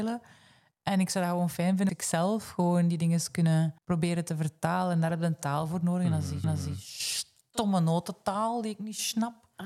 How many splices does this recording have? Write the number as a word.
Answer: three